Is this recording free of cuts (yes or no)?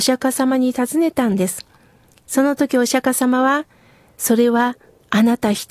yes